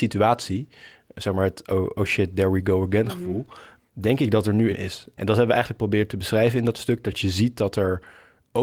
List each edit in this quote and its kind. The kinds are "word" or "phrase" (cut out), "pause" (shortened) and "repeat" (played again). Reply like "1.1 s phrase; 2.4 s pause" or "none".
4.7 s phrase